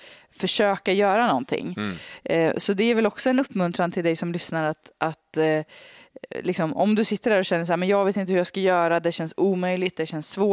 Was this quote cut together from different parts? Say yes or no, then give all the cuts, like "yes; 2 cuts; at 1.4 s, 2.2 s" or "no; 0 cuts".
no; 0 cuts